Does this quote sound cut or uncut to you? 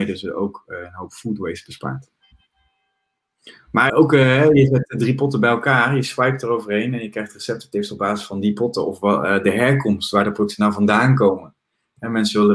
cut